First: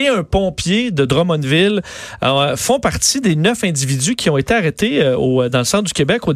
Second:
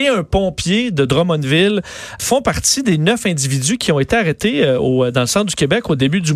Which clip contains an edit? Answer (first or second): second